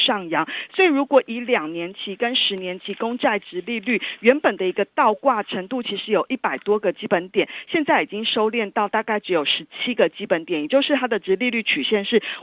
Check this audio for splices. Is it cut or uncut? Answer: uncut